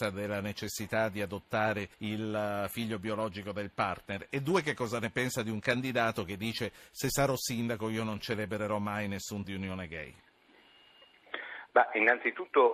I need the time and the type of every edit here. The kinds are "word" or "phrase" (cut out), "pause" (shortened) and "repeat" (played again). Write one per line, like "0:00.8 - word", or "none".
0:01.9 - pause
0:09.4 - word

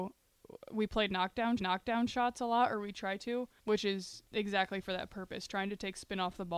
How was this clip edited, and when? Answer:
0:01.6 - repeat
0:03.6 - word
0:04.3 - pause

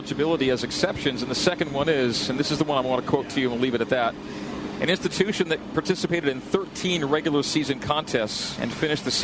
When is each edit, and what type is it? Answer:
none

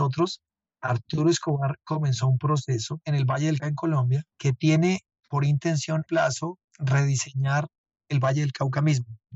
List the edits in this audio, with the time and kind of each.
0:03.6 - word
0:04.3 - pause
0:05.2 - pause
0:06.1 - phrase
0:06.7 - pause

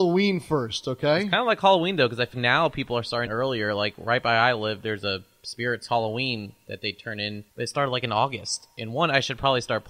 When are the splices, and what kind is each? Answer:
0:02.3 - word
0:03.3 - phrase
0:07.5 - pause

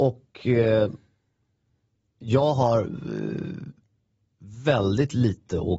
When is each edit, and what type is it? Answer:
none

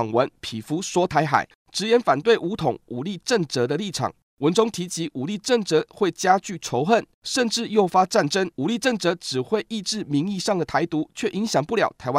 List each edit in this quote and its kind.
0:08.5 - pause

